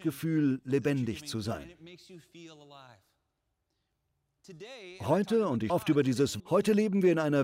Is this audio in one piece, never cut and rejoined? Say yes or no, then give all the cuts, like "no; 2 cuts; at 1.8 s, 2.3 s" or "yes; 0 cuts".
no; 2 cuts; at 5.7 s, 6.4 s